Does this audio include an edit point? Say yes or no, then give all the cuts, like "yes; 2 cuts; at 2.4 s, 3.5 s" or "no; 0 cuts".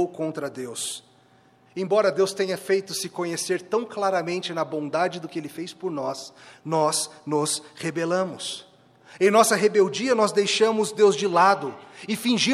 no; 0 cuts